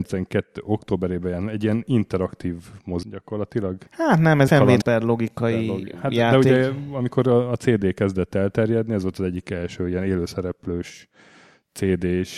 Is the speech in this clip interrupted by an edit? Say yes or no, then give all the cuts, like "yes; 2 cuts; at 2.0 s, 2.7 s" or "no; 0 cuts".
yes; 4 cuts; at 3.0 s, 3.9 s, 4.5 s, 4.8 s